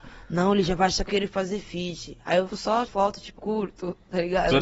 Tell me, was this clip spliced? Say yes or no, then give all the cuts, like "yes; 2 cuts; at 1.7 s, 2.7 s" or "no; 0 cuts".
yes; 4 cuts; at 1.1 s, 2.5 s, 2.9 s, 3.4 s